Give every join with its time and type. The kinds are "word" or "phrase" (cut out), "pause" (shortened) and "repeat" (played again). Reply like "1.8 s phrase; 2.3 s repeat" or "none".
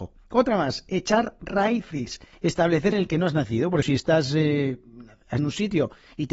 2.9 s phrase; 3.8 s word; 5.4 s word

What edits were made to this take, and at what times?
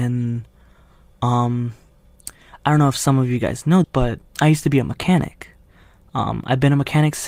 3.8 s word; 4.3 s pause

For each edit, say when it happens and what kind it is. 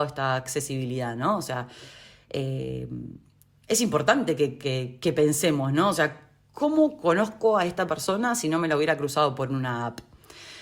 none

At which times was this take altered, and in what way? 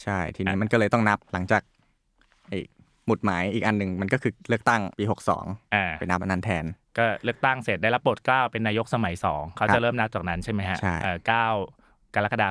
1.2 s pause; 4.9 s pause

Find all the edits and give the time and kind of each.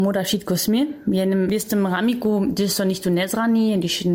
none

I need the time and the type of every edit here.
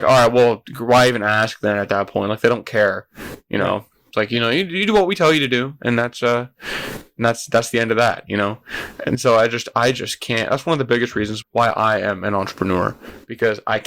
11.4 s word

